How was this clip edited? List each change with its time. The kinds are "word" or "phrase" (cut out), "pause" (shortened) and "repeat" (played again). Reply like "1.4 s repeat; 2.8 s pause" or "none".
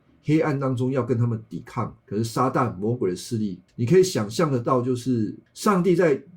2.0 s pause; 3.7 s pause; 5.5 s pause